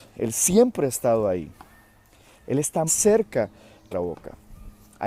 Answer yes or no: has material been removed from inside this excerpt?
yes